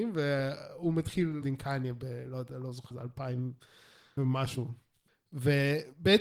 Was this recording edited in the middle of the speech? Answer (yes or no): yes